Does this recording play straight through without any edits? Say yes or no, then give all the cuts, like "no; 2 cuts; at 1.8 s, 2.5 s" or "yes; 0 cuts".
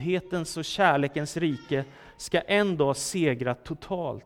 yes; 0 cuts